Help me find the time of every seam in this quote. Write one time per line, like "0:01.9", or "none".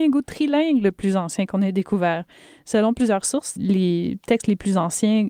0:03.6

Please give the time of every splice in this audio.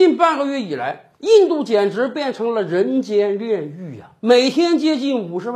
0:01.2
0:04.2

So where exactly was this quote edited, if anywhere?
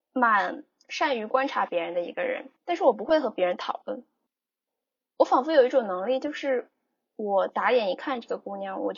0:02.6

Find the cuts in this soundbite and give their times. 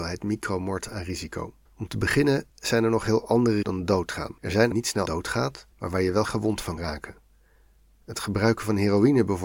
0:01.7
0:02.5
0:03.6
0:04.4
0:04.7
0:05.1
0:05.7
0:06.3
0:06.8

